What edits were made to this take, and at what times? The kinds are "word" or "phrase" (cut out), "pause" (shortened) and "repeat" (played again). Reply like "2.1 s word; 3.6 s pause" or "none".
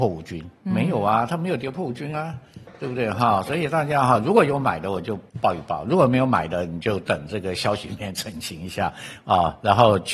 5.3 s pause